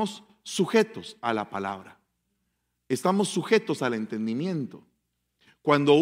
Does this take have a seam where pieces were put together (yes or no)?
no